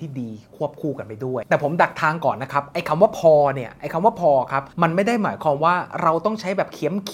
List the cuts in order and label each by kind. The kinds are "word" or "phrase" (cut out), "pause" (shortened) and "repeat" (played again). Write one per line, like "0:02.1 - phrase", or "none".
0:04.7 - pause